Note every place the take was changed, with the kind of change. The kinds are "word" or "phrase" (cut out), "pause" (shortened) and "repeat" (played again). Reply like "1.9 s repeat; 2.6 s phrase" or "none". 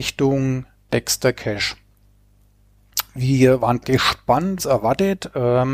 3.8 s phrase; 4.6 s phrase